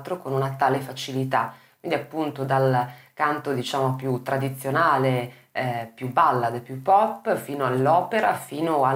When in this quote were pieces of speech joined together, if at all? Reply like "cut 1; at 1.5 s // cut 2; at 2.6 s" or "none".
none